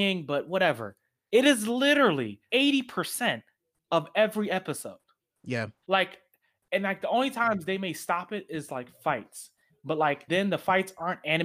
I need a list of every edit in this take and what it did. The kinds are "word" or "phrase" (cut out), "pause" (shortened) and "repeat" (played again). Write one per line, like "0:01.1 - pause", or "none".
0:02.5 - word
0:05.8 - pause
0:10.3 - word